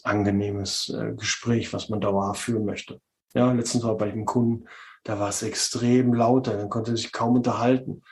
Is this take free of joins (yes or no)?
yes